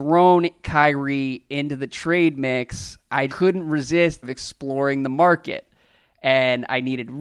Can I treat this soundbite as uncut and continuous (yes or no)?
no